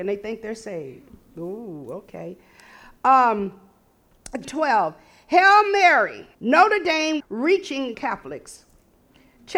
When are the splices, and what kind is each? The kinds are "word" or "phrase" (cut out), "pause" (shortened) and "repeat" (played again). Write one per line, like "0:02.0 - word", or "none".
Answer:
0:04.4 - word
0:06.3 - pause
0:07.2 - word
0:07.9 - word